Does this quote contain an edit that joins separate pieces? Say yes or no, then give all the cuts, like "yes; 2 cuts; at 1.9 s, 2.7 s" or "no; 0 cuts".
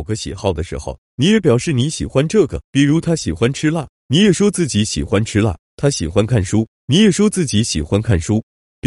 yes; 1 cut; at 2.6 s